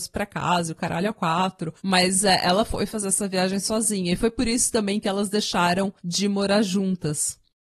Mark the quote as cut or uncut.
cut